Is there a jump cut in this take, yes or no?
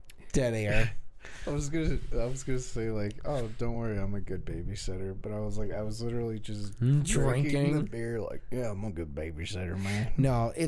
no